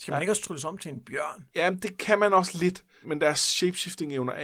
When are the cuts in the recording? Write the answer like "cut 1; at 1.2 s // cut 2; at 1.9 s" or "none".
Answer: cut 1; at 1.5 s // cut 2; at 3.0 s